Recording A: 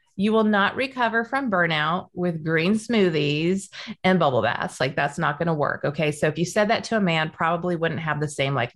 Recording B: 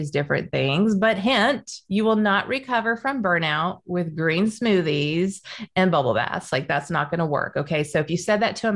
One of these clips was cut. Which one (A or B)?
B